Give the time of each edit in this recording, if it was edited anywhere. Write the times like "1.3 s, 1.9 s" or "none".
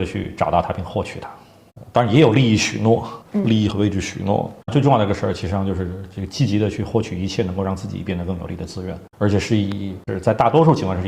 3.2 s, 4.6 s, 9.1 s, 10.0 s